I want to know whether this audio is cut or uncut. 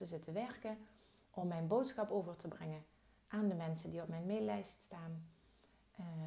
uncut